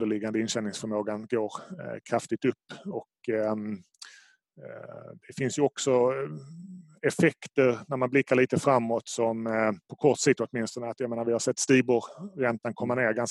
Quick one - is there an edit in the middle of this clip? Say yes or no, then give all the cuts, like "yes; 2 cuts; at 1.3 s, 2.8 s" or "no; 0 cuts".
yes; 1 cut; at 9.8 s